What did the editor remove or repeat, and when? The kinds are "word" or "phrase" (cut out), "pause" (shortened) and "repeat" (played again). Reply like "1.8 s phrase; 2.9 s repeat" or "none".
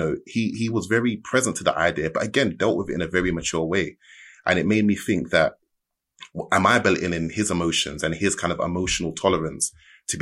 none